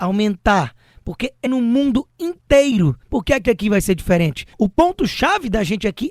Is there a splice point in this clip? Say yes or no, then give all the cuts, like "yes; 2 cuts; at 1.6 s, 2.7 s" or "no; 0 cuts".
yes; 3 cuts; at 1.5 s, 3.0 s, 4.5 s